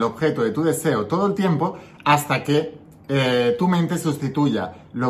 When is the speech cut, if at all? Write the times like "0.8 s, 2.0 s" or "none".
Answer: none

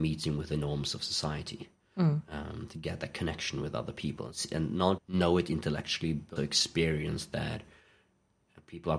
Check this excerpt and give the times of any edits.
5.0 s, 6.4 s

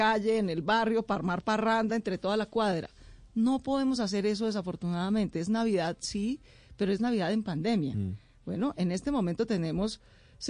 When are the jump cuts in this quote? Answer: none

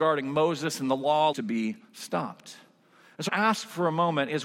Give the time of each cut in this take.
1.3 s, 1.8 s, 3.3 s

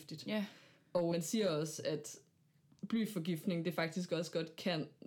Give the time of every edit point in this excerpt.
1.1 s

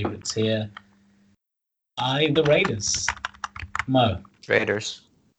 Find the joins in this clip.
2.4 s, 4.3 s

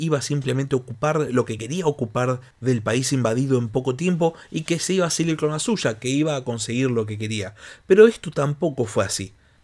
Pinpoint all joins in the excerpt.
none

